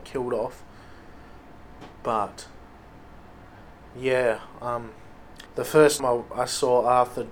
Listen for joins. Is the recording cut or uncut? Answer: cut